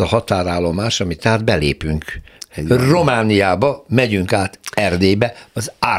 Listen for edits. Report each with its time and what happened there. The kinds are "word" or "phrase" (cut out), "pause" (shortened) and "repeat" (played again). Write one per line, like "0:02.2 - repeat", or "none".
0:01.2 - word